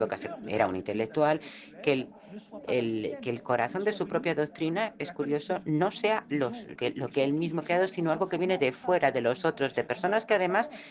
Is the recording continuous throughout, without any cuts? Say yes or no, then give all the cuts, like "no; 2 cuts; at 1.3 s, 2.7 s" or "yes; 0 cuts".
no; 1 cut; at 6.8 s